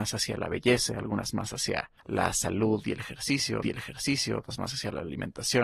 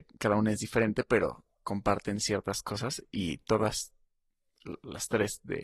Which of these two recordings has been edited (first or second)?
first